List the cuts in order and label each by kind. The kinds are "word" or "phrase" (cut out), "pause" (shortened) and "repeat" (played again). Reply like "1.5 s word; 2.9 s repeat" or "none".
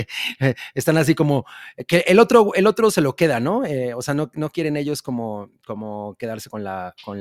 none